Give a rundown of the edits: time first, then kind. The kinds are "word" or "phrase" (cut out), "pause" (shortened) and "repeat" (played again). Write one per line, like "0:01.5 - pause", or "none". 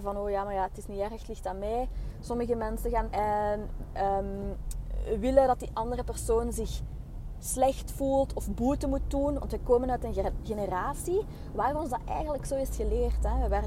0:03.0 - phrase